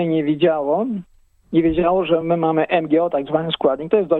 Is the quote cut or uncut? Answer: uncut